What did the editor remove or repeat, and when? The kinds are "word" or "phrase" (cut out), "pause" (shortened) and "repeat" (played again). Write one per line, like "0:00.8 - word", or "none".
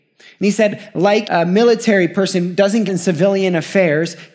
0:01.2 - word
0:02.9 - phrase